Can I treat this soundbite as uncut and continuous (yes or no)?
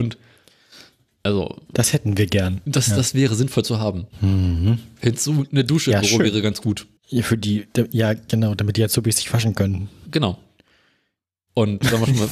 no